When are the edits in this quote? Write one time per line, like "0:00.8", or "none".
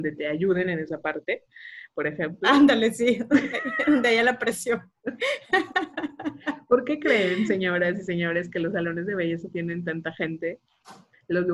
none